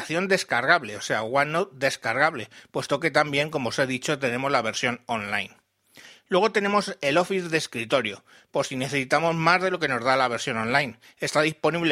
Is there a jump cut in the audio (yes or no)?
no